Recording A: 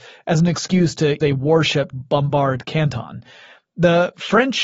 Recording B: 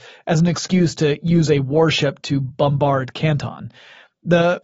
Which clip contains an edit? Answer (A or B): A